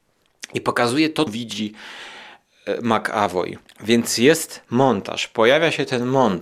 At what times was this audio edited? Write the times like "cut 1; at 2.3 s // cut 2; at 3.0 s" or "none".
cut 1; at 1.3 s // cut 2; at 3.7 s